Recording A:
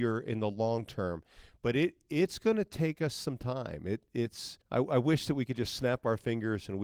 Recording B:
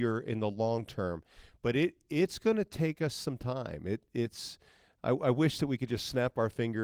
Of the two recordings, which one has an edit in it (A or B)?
A